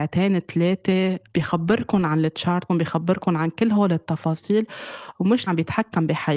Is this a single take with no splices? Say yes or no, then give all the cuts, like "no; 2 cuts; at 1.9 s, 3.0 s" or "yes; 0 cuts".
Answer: no; 2 cuts; at 2.7 s, 5.5 s